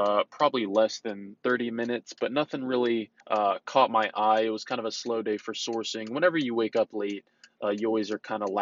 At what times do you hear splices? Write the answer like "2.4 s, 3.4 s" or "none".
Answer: 1.4 s, 3.2 s